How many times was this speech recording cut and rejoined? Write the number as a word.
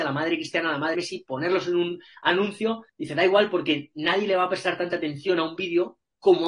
two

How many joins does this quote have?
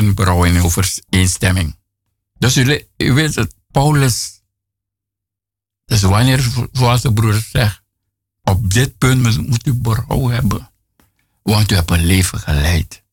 zero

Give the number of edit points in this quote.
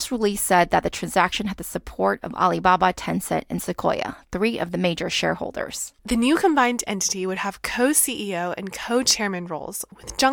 one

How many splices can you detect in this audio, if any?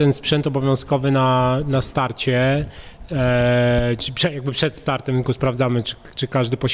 zero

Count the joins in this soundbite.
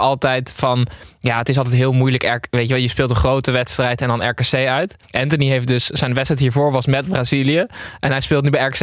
one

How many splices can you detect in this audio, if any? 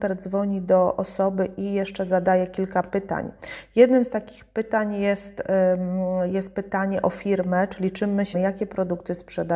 one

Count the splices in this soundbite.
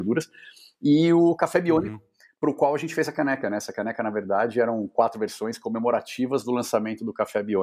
zero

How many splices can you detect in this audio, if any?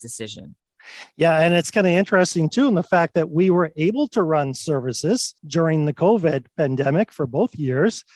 one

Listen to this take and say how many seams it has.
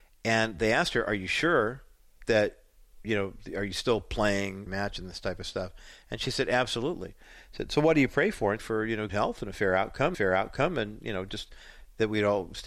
four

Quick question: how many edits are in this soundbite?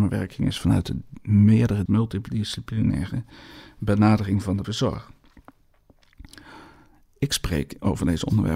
two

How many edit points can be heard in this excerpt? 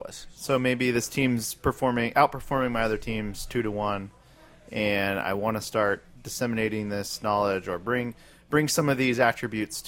zero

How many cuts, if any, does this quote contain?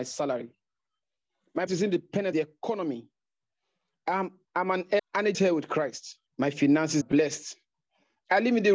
seven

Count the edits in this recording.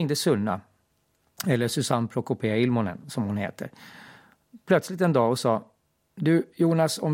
zero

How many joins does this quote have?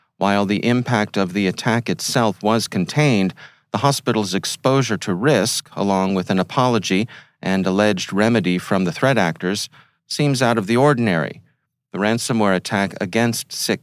zero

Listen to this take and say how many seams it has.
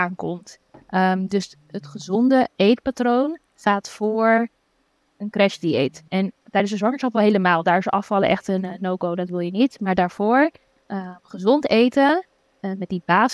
three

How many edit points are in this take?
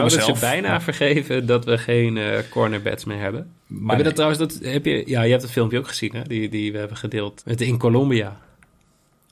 two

